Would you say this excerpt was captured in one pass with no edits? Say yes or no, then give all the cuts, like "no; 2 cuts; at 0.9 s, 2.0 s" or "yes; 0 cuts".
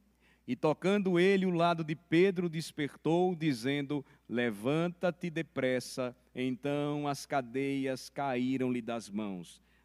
yes; 0 cuts